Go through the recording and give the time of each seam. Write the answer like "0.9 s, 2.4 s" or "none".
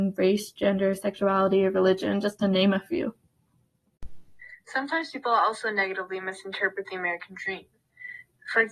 none